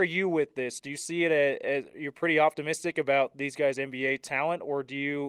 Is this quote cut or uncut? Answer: cut